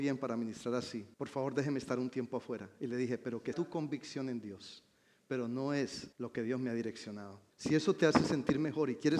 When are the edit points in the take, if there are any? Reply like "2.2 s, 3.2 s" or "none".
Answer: 1.1 s, 3.5 s, 6.1 s, 7.5 s